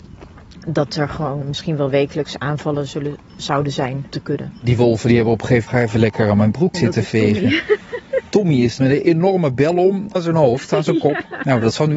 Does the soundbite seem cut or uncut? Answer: cut